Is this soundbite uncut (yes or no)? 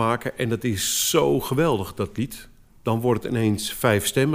yes